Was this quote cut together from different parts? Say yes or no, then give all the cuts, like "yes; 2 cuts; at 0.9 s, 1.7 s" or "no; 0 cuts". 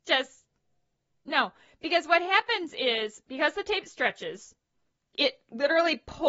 no; 0 cuts